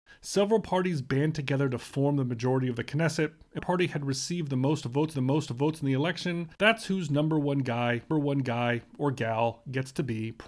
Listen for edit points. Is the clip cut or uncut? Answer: cut